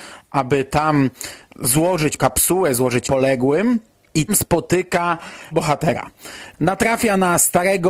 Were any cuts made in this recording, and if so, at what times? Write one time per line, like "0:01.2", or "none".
0:02.2
0:03.0
0:04.3
0:05.5